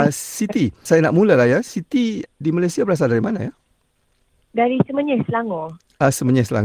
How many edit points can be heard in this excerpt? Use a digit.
0